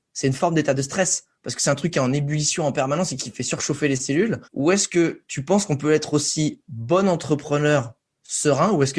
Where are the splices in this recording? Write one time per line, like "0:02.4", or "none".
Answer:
0:04.4